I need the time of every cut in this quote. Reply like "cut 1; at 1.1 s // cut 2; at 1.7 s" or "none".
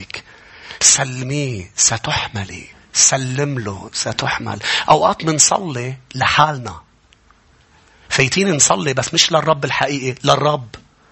cut 1; at 2.7 s